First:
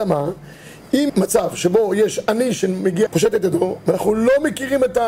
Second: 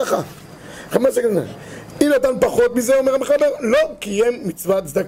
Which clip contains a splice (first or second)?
first